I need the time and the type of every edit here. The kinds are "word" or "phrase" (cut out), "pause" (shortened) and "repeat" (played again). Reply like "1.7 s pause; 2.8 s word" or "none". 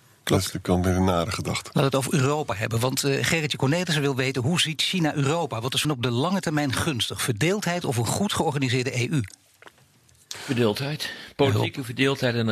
5.8 s word

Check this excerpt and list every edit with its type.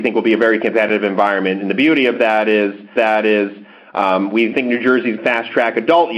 3.0 s repeat; 4.5 s word; 5.2 s word

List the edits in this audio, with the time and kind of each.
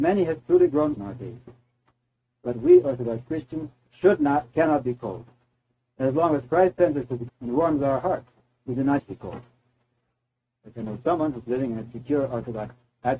1.0 s word; 7.3 s word; 9.0 s word

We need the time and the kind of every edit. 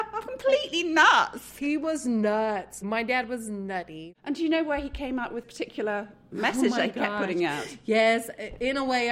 5.4 s word

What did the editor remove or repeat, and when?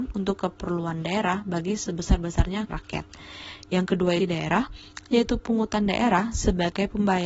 2.7 s word; 4.2 s phrase

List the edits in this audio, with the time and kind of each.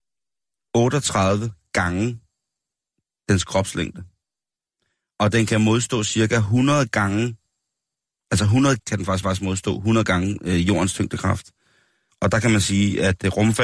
4.7 s pause; 8.8 s word; 9.2 s repeat

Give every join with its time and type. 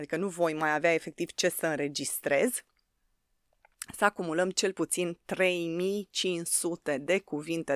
none

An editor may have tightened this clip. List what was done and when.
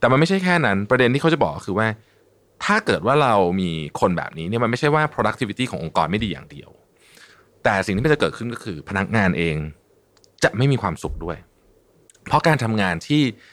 none

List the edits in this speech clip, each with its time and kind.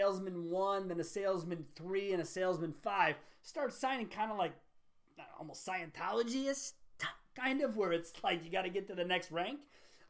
none

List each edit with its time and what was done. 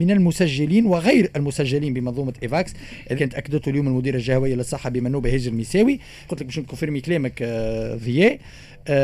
3.2 s word; 6.3 s phrase

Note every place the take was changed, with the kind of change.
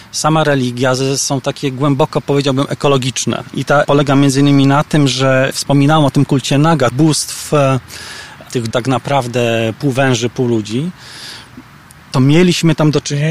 3.8 s word; 6.9 s word; 8.7 s word

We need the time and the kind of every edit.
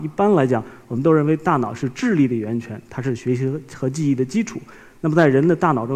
none

